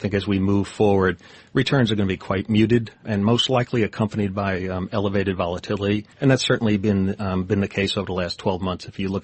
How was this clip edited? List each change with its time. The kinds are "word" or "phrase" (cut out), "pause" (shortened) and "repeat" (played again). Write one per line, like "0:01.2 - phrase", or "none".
0:03.0 - word
0:06.1 - pause